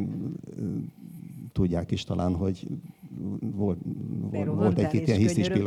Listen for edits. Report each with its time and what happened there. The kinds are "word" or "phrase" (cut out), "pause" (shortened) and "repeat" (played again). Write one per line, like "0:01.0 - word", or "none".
none

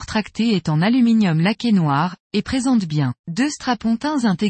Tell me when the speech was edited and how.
0:03.2 - pause

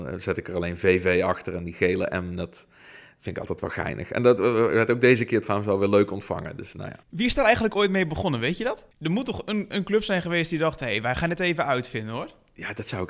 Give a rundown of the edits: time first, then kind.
0:07.0 - pause
0:08.9 - pause

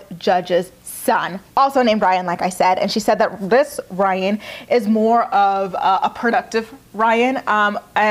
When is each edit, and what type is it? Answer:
0:01.5 - pause

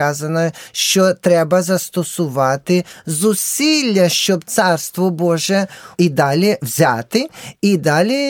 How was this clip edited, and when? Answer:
none

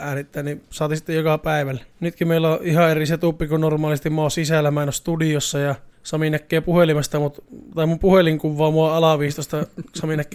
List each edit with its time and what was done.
0:01.9 - pause
0:05.9 - pause

